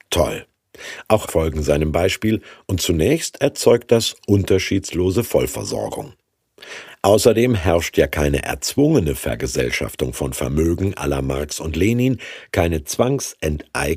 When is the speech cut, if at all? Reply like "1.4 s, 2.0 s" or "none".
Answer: 1.3 s

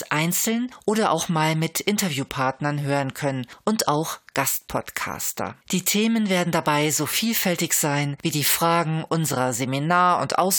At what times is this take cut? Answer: 5.6 s

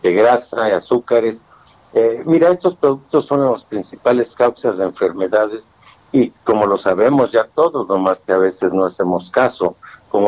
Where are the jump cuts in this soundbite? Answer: none

